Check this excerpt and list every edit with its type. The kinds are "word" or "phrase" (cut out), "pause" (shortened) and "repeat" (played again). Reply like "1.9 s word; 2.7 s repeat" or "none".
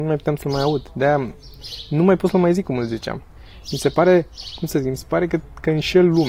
none